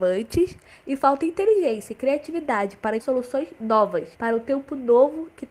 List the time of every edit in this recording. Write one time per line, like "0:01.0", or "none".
0:03.0
0:04.1